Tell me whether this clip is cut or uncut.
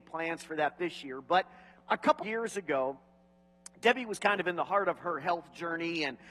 cut